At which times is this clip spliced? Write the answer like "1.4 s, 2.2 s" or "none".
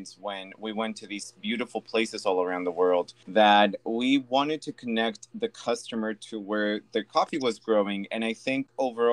3.2 s